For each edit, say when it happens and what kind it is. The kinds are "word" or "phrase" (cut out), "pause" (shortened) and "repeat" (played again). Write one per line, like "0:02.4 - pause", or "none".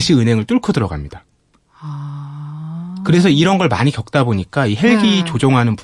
none

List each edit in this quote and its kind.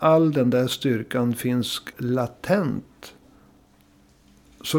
0:01.9 - word

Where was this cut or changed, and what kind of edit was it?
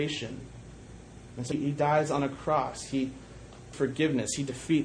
0:01.5 - word
0:03.7 - word

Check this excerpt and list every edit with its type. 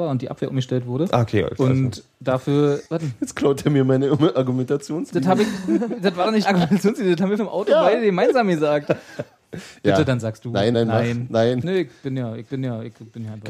0:02.9 - pause
0:06.4 - word
0:07.4 - word
0:10.7 - word
0:12.5 - repeat

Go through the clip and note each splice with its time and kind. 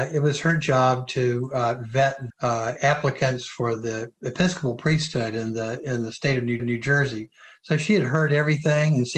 0:02.3 - word
0:06.6 - repeat

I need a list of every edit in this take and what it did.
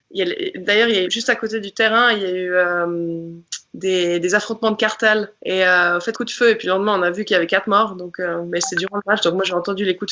0:01.0 - phrase
0:05.4 - pause
0:06.1 - phrase

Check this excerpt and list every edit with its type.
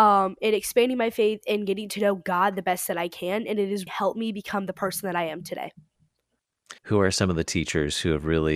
0:03.9 - word
0:06.8 - pause

